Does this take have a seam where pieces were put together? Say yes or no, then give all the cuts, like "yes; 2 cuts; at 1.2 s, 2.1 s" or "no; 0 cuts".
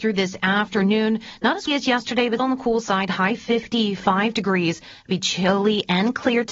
yes; 2 cuts; at 1.7 s, 2.4 s